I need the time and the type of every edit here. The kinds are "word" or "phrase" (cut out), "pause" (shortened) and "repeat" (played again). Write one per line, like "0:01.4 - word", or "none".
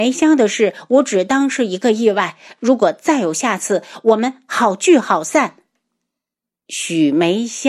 none